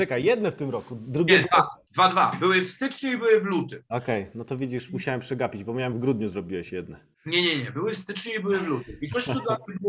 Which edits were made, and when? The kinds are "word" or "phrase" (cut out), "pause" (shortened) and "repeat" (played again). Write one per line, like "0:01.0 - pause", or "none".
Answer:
0:01.9 - pause
0:05.9 - phrase
0:07.1 - pause